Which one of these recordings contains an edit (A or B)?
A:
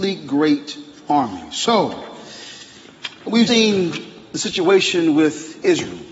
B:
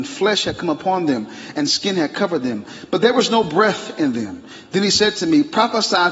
A